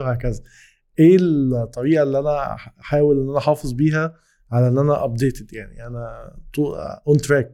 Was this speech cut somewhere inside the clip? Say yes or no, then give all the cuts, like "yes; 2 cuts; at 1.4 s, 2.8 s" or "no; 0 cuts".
no; 0 cuts